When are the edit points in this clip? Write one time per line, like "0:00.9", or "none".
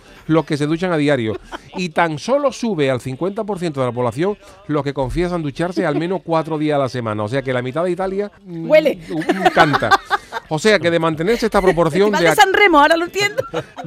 0:08.4